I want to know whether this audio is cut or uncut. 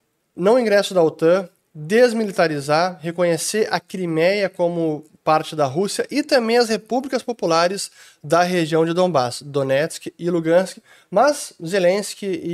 uncut